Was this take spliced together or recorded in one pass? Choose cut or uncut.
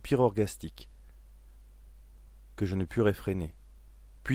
uncut